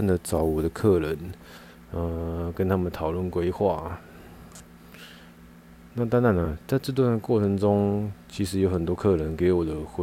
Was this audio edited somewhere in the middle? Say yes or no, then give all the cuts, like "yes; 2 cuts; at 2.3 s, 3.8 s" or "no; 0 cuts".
no; 0 cuts